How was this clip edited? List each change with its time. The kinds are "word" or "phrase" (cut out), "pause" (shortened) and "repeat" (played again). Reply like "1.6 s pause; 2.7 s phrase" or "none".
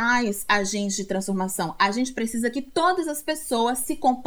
none